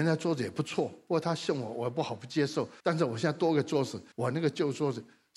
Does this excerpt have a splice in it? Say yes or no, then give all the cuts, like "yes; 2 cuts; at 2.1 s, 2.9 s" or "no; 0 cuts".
yes; 2 cuts; at 2.8 s, 4.1 s